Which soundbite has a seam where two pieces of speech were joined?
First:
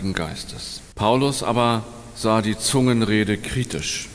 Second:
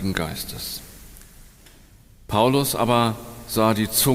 first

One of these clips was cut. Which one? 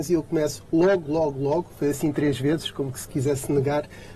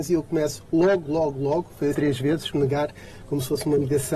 second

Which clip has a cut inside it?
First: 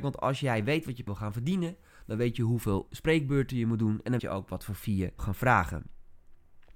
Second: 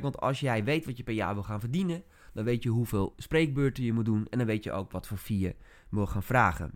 first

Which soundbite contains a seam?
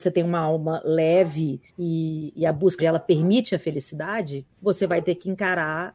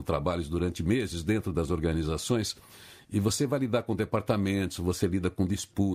first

